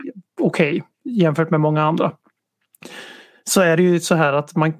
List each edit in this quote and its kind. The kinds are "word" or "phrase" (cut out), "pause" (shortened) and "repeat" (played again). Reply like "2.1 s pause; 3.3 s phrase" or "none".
0.9 s pause

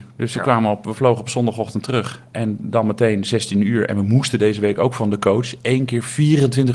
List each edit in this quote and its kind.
none

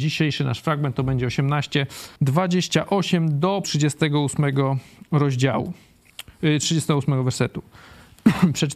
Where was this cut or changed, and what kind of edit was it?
2.2 s pause; 3.6 s word

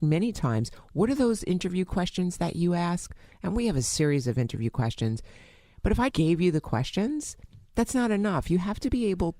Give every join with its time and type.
6.1 s word

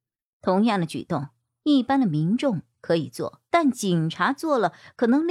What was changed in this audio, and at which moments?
3.5 s pause

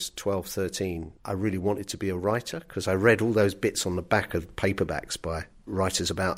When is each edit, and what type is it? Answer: 1.2 s pause

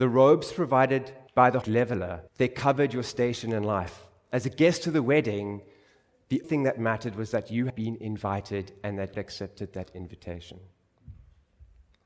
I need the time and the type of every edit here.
1.3 s pause; 1.6 s phrase; 2.3 s pause; 6.4 s word; 7.7 s word; 9.1 s phrase

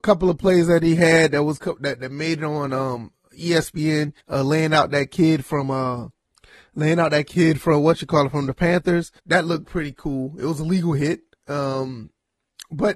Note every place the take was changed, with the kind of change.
4.2 s pause; 6.3 s pause; 9.2 s pause; 11.3 s pause

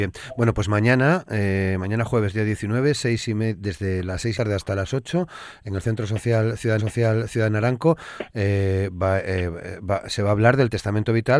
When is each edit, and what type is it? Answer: 4.3 s phrase; 6.8 s repeat

